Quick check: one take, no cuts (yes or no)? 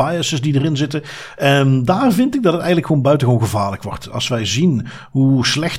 yes